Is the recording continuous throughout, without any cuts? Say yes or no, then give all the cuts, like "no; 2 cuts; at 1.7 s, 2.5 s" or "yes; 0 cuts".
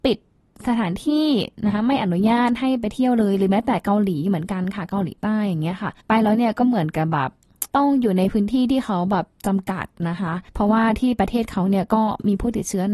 no; 3 cuts; at 6.0 s, 7.7 s, 10.5 s